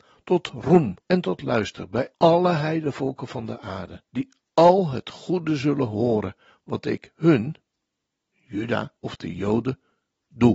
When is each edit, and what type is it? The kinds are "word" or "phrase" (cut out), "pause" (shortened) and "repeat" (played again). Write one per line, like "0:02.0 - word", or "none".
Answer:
0:01.0 - pause
0:02.1 - pause
0:04.1 - pause
0:09.0 - pause